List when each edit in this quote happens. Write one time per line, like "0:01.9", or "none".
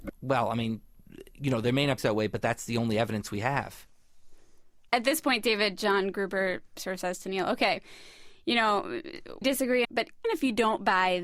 0:02.0
0:09.4
0:09.8
0:10.2